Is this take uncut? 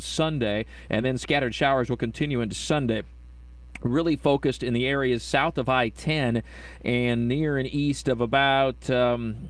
yes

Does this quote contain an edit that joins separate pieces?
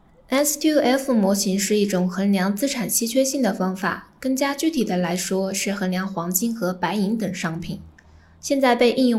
no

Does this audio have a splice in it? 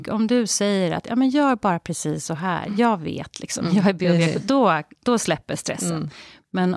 no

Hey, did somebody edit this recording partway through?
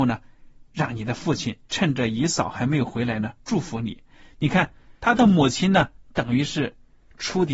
yes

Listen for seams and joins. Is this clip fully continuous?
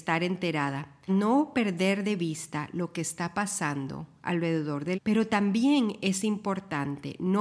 no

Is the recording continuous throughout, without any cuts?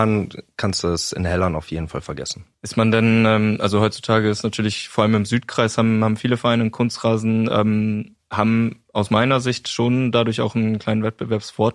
no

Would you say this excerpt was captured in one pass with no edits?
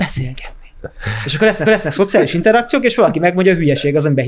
no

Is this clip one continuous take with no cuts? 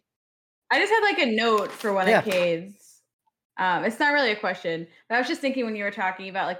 yes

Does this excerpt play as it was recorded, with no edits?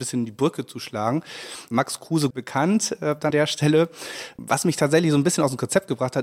no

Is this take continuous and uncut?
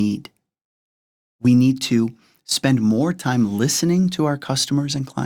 yes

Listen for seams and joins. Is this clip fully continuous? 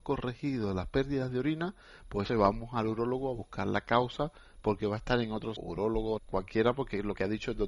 no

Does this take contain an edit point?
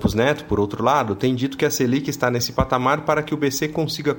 no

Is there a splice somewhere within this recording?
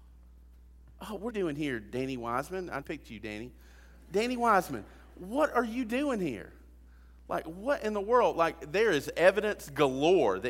yes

